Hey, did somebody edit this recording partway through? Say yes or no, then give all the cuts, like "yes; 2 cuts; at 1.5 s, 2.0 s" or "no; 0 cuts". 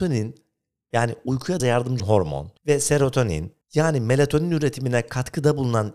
yes; 4 cuts; at 1.6 s, 2.0 s, 2.6 s, 3.6 s